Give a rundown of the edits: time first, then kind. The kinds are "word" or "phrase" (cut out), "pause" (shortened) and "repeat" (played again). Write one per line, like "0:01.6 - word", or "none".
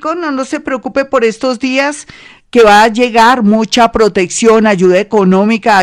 none